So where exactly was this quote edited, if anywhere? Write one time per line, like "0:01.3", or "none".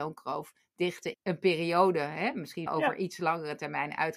0:01.1
0:02.7